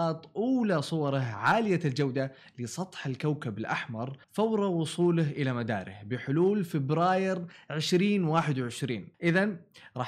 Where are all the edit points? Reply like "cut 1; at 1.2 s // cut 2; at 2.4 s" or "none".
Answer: cut 1; at 4.2 s // cut 2; at 9.1 s